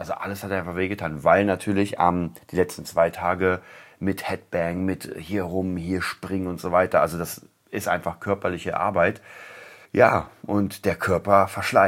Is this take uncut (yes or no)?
no